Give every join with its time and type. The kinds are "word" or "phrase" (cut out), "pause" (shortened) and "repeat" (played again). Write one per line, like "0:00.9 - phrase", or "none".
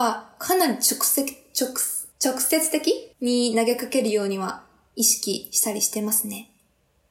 0:02.1 - pause
0:03.1 - pause